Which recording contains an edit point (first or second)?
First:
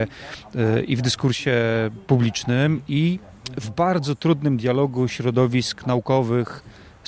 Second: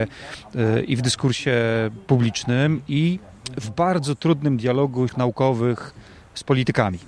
second